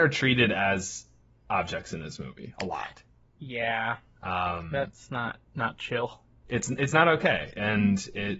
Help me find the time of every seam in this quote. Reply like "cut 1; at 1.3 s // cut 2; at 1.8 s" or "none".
none